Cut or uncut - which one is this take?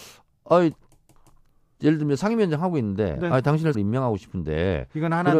cut